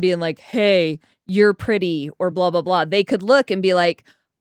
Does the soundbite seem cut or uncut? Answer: uncut